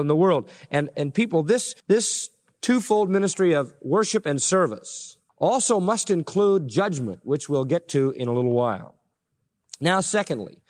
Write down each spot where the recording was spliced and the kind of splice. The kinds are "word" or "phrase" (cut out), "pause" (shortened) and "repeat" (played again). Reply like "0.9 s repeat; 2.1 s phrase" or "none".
1.8 s pause; 5.3 s pause